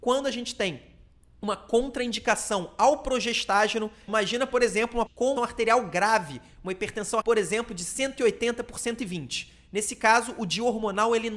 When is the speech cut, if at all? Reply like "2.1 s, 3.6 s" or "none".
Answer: 4.1 s, 5.1 s, 5.4 s, 7.2 s